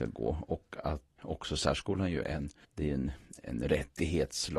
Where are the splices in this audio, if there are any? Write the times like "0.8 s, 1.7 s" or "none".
1.2 s, 2.2 s, 2.6 s, 3.4 s